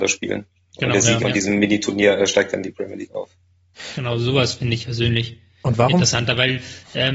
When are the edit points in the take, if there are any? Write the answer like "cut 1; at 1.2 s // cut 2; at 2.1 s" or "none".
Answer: cut 1; at 1.2 s // cut 2; at 4.8 s